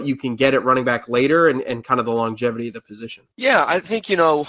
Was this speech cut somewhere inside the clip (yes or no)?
yes